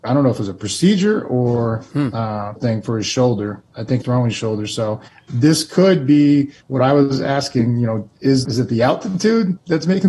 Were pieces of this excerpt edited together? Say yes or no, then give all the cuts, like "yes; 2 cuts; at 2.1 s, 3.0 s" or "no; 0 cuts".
yes; 6 cuts; at 2.6 s, 3.7 s, 4.0 s, 5.1 s, 6.6 s, 8.4 s